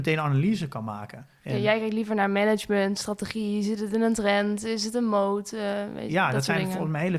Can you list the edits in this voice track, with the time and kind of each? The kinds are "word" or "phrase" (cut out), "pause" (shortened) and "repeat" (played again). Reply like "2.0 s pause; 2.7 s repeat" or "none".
none

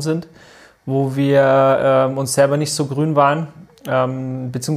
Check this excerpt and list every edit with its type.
none

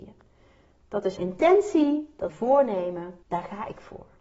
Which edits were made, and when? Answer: 1.2 s word; 2.3 s phrase; 3.2 s pause

